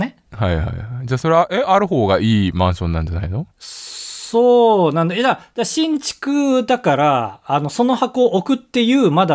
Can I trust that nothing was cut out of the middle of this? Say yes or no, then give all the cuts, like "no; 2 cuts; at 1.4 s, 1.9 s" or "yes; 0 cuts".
no; 1 cut; at 3.5 s